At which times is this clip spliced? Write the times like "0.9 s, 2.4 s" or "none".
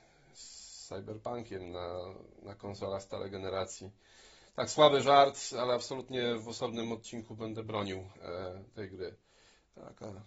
none